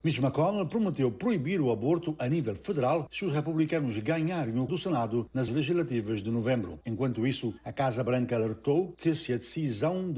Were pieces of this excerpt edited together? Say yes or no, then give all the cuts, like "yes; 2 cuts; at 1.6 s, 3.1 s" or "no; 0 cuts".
yes; 2 cuts; at 4.7 s, 5.5 s